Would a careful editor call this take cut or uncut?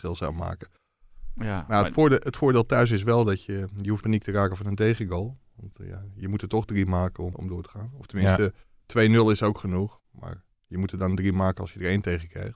cut